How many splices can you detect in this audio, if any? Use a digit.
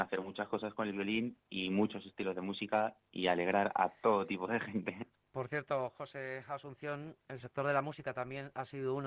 0